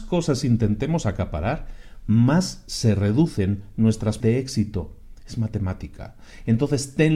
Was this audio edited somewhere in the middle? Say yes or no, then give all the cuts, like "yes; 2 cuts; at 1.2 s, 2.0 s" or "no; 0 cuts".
yes; 1 cut; at 4.2 s